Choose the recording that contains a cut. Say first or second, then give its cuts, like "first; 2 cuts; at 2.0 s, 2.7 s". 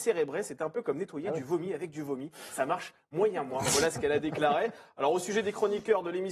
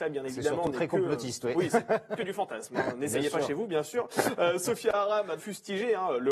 second; 2 cuts; at 2.2 s, 5.4 s